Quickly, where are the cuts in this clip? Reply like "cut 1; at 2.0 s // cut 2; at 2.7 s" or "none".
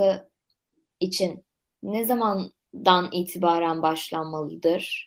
none